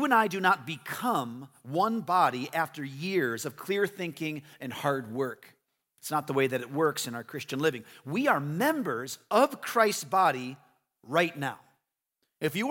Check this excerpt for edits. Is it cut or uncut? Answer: uncut